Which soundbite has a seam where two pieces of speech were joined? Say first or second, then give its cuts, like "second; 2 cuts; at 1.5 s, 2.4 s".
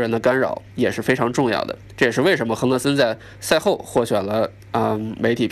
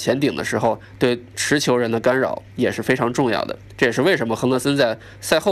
first; 1 cut; at 4.6 s